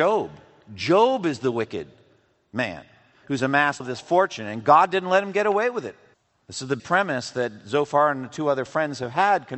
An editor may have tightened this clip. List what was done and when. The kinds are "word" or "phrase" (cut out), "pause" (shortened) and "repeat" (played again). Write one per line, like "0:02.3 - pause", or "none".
0:03.8 - word
0:06.1 - pause
0:06.8 - word